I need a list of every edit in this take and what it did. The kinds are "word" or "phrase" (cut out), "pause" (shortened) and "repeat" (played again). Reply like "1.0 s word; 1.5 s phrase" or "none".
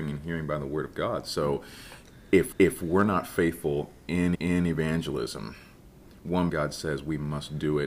2.5 s repeat; 4.3 s repeat; 6.5 s word